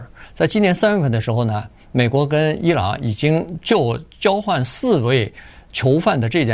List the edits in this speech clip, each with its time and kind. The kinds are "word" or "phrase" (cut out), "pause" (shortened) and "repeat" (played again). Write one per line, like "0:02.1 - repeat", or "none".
none